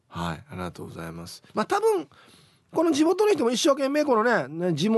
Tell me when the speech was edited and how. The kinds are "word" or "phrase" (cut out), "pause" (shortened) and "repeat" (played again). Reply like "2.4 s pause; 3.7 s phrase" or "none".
1.5 s pause